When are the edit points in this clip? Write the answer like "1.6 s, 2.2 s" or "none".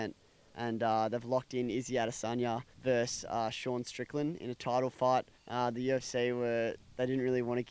2.7 s, 5.3 s